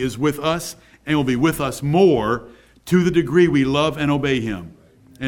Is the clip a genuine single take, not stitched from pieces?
yes; 0 cuts

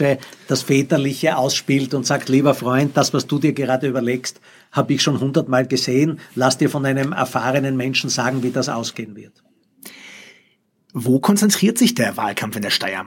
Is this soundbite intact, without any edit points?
yes; 0 cuts

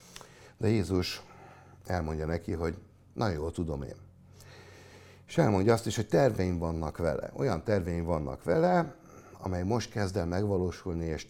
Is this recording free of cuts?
yes; 0 cuts

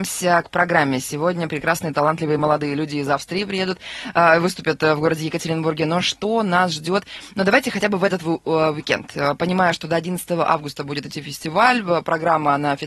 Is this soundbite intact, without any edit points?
yes; 0 cuts

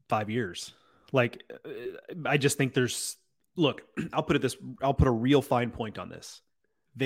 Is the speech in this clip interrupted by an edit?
no; 0 cuts

